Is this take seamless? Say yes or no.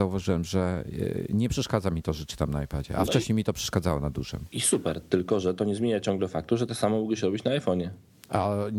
yes